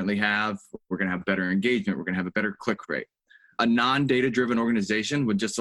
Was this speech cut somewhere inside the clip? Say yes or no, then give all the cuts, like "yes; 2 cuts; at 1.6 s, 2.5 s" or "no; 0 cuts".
no; 0 cuts